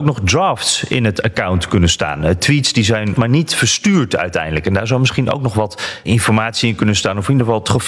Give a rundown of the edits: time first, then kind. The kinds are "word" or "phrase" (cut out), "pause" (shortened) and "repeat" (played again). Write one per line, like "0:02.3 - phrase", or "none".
0:03.1 - word
0:06.0 - word